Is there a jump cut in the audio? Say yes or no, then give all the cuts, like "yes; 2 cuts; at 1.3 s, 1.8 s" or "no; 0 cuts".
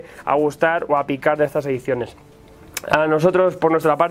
no; 0 cuts